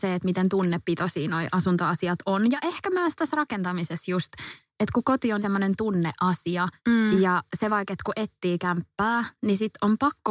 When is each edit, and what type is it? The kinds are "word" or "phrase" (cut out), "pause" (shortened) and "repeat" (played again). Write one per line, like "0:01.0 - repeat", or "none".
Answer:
0:05.4 - word
0:06.8 - pause